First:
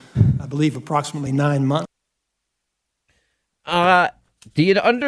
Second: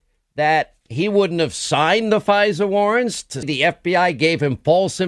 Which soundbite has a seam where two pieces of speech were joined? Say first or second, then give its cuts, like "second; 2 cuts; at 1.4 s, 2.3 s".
second; 1 cut; at 3.4 s